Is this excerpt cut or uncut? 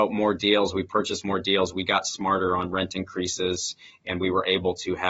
uncut